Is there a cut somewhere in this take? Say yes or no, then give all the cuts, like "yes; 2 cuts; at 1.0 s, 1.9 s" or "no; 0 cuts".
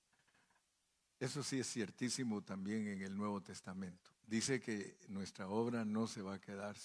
yes; 1 cut; at 4.2 s